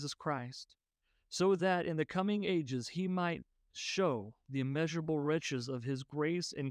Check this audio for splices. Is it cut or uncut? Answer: uncut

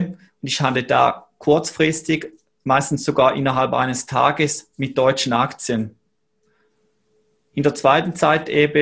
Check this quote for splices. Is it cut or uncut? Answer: uncut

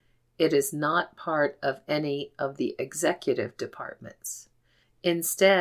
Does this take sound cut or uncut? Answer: uncut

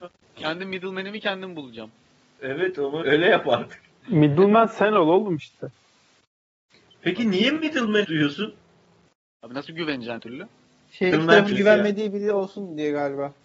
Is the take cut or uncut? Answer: cut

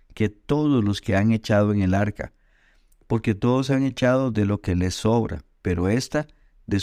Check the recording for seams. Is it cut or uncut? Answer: uncut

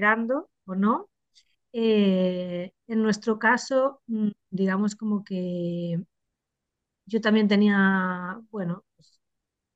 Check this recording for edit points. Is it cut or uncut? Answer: uncut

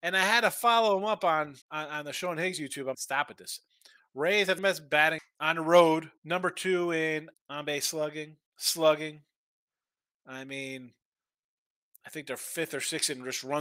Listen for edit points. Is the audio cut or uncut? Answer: cut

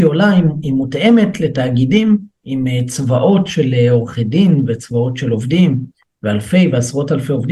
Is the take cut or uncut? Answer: uncut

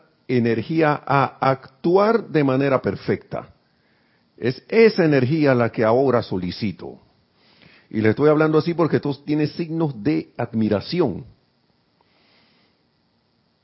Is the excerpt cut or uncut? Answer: uncut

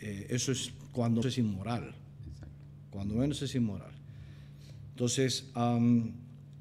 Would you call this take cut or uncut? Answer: cut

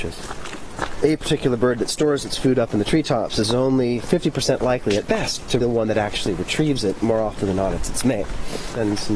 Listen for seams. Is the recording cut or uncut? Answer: cut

